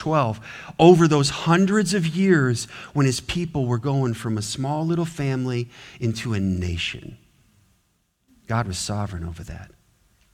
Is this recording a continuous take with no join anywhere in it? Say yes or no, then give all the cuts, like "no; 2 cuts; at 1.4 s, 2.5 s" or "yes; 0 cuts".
yes; 0 cuts